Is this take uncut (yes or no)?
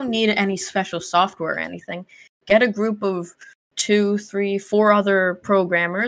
yes